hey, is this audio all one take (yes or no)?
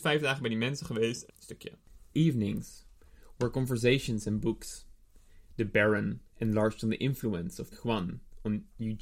no